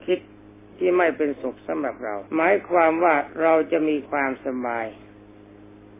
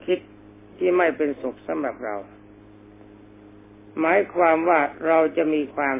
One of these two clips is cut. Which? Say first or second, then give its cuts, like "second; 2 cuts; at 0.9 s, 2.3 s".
first; 1 cut; at 2.3 s